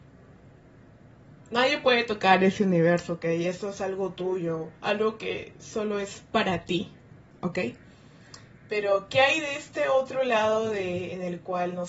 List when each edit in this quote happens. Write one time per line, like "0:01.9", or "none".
0:04.8